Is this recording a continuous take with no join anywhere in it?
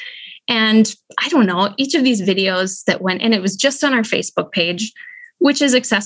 yes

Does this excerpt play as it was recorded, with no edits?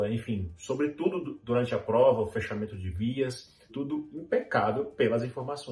no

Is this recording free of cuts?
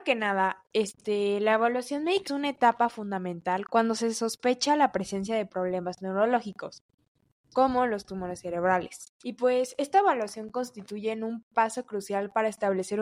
no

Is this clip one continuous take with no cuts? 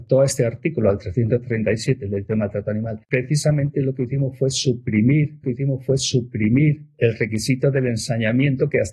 no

